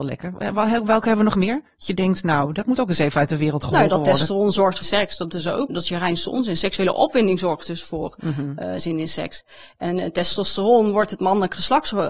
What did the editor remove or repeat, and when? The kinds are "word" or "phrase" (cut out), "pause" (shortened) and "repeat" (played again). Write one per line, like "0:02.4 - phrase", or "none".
0:04.8 - phrase
0:05.7 - word